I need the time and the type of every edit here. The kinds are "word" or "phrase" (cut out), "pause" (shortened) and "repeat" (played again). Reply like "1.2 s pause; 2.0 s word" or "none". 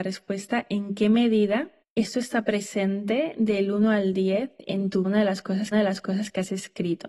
1.8 s pause; 5.0 s phrase; 5.7 s repeat